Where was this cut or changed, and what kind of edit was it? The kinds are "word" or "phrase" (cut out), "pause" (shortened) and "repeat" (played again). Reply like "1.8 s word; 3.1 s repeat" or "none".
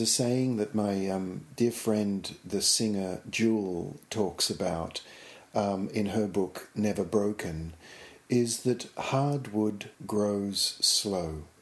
9.9 s pause